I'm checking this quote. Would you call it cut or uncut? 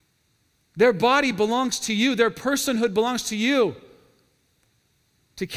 uncut